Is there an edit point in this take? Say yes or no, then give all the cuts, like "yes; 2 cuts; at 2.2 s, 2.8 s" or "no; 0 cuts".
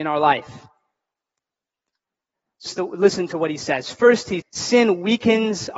yes; 2 cuts; at 2.7 s, 4.4 s